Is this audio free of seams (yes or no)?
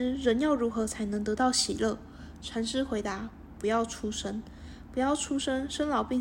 yes